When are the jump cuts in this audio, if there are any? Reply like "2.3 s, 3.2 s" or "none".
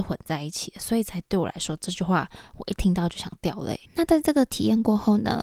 3.8 s